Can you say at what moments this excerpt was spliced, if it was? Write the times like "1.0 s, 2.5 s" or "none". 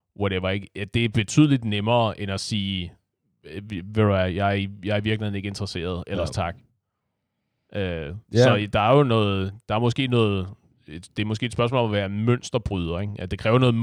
none